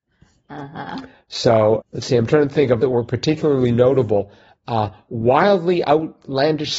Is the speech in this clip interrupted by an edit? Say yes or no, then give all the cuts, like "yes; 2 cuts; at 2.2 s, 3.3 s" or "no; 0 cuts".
yes; 2 cuts; at 1.8 s, 2.8 s